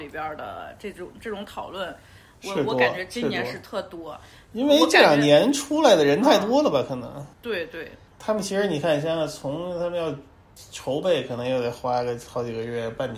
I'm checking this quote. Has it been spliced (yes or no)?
yes